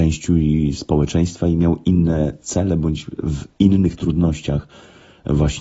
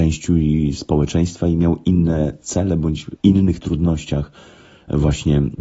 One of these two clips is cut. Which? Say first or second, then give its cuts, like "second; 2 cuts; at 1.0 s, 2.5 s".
second; 1 cut; at 3.2 s